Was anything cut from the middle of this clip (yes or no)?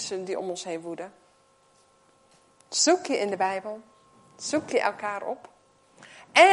no